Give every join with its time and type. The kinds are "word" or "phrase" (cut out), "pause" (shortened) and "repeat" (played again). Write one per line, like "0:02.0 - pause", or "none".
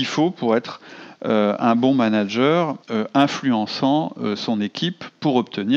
0:02.8 - pause